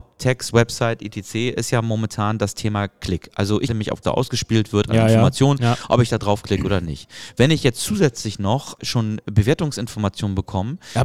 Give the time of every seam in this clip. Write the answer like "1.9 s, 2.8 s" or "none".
3.7 s, 4.0 s, 8.8 s

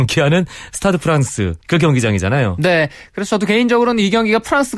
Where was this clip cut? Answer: 1.6 s

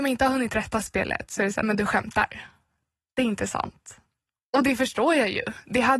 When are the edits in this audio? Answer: 1.6 s

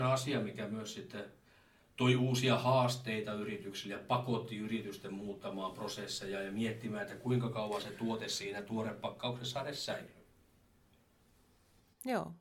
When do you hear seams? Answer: none

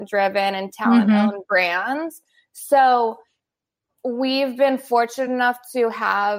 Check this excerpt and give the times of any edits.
none

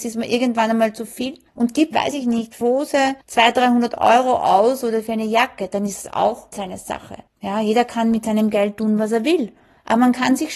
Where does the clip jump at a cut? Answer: 1.5 s, 1.9 s, 2.6 s, 3.2 s, 6.5 s, 7.3 s

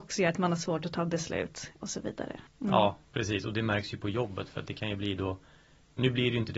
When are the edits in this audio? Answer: 1.8 s, 2.5 s, 3.1 s

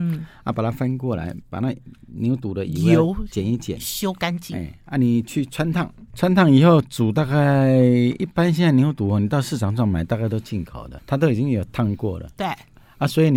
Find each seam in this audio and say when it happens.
1.4 s, 6.1 s, 11.0 s

